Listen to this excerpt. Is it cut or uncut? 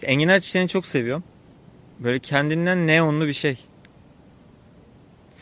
uncut